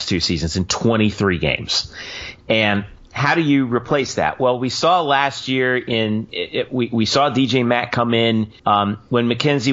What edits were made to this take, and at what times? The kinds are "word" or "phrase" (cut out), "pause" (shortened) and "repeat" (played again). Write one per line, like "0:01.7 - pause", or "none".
0:06.3 - word
0:08.6 - pause